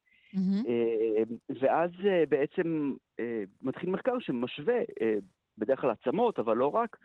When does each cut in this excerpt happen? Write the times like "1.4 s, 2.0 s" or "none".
none